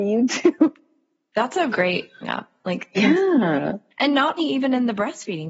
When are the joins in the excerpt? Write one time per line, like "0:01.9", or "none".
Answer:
0:01.7
0:02.2
0:03.9
0:04.4

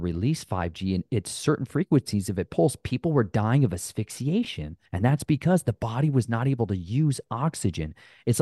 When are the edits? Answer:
0:04.9

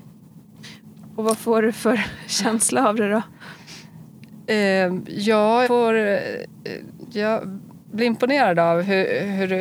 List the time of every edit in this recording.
0:05.7

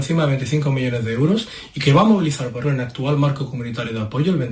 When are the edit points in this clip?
0:02.6

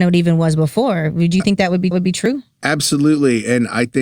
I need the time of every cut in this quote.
0:01.9

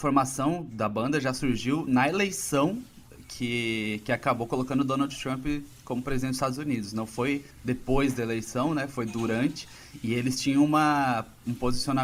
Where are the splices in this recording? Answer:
0:07.5

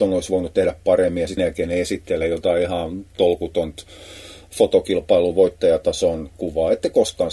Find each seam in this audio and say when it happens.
0:01.4

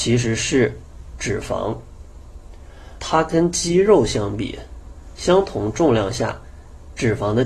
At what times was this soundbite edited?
0:03.0

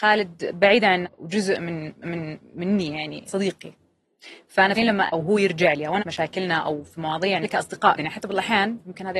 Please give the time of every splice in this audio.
0:01.0
0:02.0
0:03.3
0:04.8
0:05.1
0:06.0
0:07.4
0:08.0

